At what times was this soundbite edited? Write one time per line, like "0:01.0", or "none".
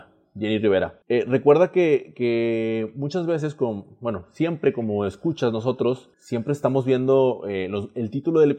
0:01.0
0:06.1